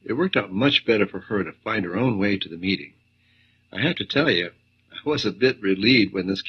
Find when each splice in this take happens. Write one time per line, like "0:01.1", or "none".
none